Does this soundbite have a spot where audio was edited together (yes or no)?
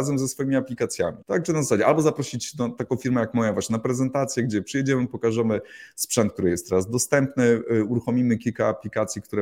yes